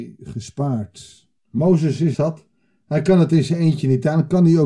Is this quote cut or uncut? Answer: cut